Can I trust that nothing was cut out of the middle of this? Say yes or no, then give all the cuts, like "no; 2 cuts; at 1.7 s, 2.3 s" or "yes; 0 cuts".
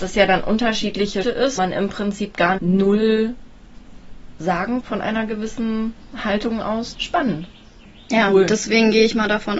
no; 5 cuts; at 1.2 s, 1.6 s, 2.6 s, 4.8 s, 6.9 s